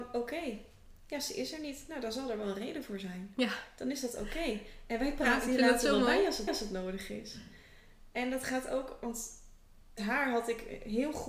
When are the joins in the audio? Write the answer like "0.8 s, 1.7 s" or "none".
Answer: 6.5 s, 10.0 s

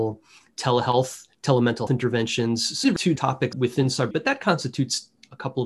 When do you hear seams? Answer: 1.9 s, 2.8 s, 3.2 s, 3.5 s, 4.1 s

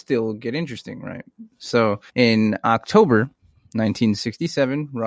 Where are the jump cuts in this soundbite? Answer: 2.1 s

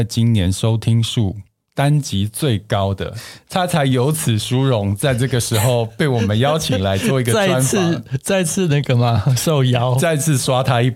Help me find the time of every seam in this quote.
none

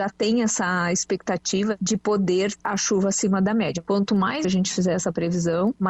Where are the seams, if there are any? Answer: 2.6 s, 4.4 s

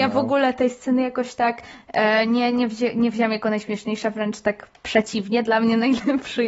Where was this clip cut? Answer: none

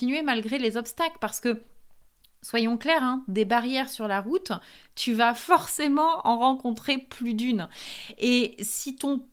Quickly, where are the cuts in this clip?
none

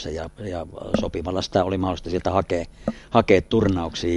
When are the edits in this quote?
none

